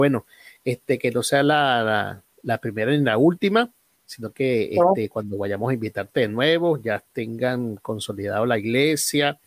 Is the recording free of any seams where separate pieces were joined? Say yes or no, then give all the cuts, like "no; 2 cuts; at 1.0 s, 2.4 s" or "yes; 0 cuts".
yes; 0 cuts